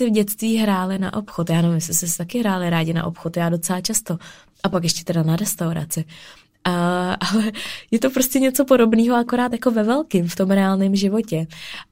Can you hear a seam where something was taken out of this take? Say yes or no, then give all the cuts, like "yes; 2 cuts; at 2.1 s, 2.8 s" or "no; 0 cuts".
no; 0 cuts